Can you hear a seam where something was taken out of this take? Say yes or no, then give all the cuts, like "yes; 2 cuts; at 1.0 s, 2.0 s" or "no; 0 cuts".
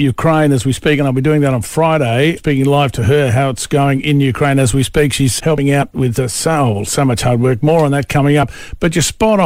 yes; 2 cuts; at 2.4 s, 5.4 s